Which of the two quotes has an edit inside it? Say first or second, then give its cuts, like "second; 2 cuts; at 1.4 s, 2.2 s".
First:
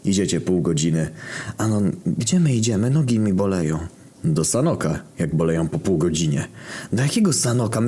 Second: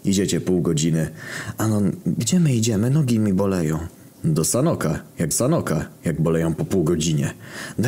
second; 1 cut; at 5.3 s